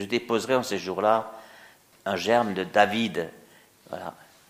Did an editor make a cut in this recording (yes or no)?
no